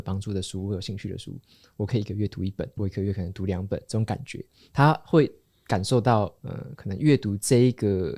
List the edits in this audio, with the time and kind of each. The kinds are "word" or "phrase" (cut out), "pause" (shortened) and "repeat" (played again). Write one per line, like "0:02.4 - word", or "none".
0:02.8 - word